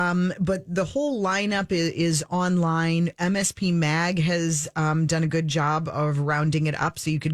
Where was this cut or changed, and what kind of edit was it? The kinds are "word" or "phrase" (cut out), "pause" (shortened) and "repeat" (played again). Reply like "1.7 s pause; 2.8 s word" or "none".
none